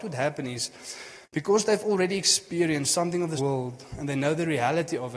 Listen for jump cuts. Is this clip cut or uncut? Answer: cut